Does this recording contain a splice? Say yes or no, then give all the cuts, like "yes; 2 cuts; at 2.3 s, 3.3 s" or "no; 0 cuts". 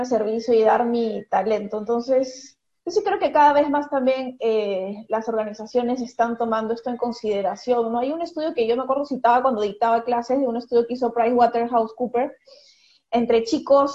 no; 0 cuts